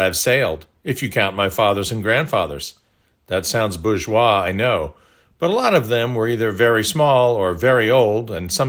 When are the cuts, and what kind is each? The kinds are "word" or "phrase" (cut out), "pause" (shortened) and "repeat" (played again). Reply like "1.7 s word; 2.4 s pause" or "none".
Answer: none